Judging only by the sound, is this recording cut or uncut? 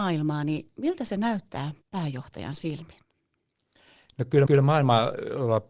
cut